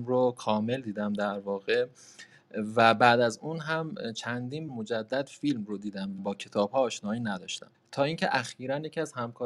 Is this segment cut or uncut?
cut